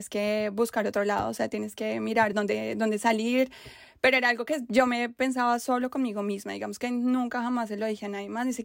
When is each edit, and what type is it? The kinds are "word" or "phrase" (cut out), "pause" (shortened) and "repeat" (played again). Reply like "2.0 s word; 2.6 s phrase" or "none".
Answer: none